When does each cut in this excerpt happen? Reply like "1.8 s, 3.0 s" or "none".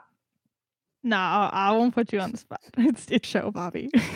3.2 s